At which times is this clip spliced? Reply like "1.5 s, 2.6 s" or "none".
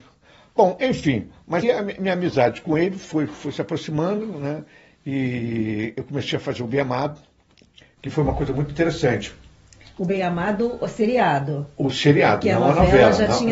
1.6 s